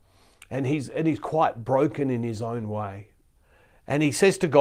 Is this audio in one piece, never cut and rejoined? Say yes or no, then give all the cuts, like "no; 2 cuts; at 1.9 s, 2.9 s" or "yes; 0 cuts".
yes; 0 cuts